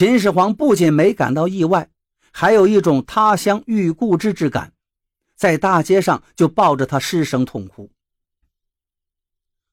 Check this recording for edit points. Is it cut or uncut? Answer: uncut